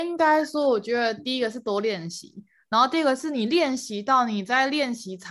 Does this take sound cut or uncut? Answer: uncut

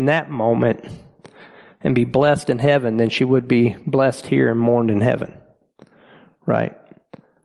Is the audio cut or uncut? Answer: uncut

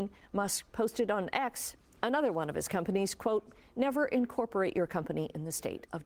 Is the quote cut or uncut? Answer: uncut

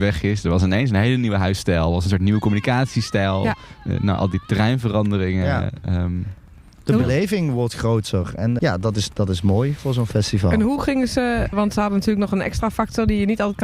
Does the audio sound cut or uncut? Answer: cut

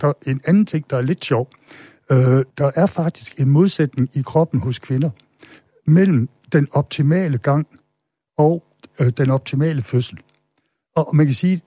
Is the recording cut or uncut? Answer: cut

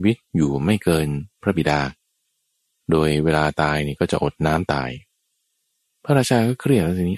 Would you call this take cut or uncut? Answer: uncut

